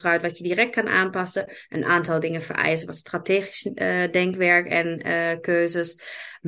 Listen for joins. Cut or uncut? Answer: uncut